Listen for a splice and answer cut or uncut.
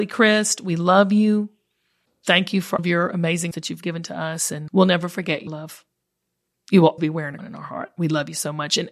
cut